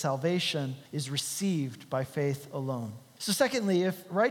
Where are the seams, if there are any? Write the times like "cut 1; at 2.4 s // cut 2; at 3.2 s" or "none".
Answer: none